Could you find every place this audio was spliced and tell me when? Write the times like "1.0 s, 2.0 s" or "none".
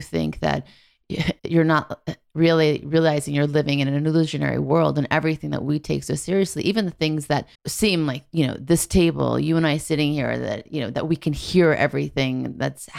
1.4 s, 7.5 s